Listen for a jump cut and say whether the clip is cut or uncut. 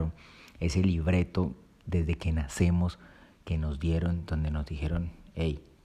uncut